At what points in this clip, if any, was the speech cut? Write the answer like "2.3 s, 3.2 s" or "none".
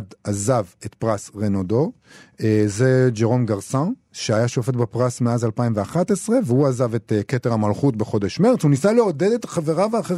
none